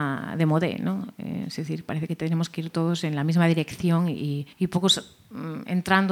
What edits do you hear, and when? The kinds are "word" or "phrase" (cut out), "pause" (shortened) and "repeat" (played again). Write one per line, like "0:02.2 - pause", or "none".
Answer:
0:04.5 - pause

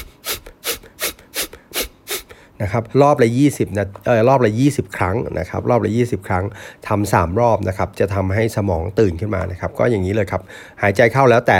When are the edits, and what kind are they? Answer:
0:02.9 - pause

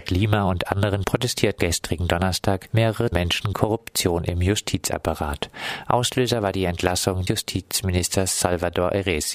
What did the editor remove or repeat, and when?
0:01.0 - word
0:01.6 - word
0:03.1 - word
0:03.5 - word
0:07.3 - word

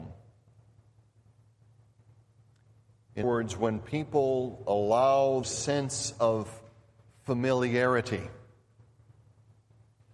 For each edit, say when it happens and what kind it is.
0:03.2 - word
0:05.4 - word

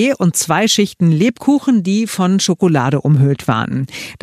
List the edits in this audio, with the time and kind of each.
none

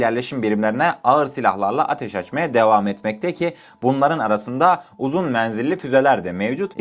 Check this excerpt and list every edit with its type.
none

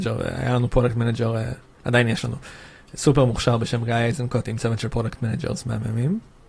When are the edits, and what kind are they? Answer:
none

